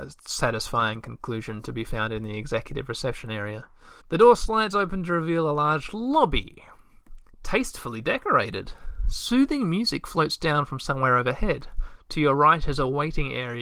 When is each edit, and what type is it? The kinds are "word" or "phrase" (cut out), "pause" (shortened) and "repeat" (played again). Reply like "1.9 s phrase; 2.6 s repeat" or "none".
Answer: 4.0 s pause